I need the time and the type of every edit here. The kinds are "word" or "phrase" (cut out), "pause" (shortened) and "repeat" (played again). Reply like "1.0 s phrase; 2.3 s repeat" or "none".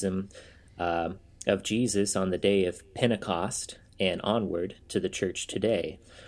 3.9 s pause